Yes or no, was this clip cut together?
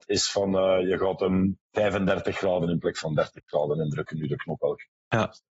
no